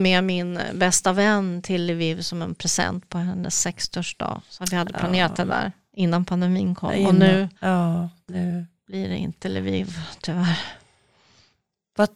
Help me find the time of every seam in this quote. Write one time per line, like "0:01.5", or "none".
0:07.6